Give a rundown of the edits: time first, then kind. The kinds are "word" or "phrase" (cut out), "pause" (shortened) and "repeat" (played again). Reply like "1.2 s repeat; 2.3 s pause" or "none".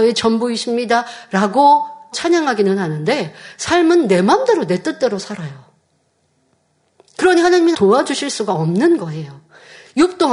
2.1 s word; 7.7 s word